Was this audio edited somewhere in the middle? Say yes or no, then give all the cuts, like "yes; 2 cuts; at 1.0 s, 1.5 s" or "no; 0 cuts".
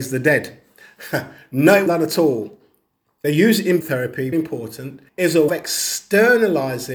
yes; 6 cuts; at 1.9 s, 3.2 s, 3.8 s, 4.3 s, 5.1 s, 5.5 s